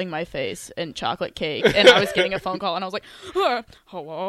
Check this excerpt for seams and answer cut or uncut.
uncut